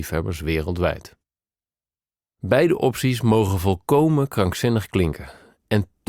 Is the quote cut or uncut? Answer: uncut